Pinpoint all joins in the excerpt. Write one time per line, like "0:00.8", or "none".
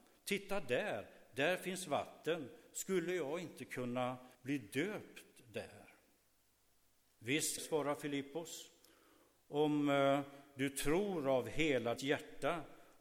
0:04.3
0:07.6
0:12.0